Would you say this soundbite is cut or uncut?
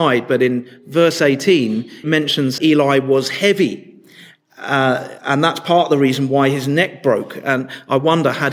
cut